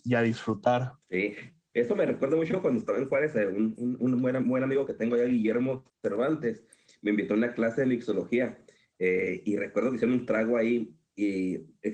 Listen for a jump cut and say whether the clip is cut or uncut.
cut